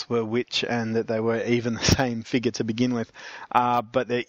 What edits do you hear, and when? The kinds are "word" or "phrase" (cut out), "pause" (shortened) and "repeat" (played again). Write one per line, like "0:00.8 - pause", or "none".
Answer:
none